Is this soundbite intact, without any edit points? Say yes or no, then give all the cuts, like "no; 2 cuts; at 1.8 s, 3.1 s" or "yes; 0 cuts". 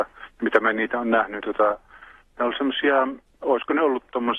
no; 2 cuts; at 1.4 s, 3.3 s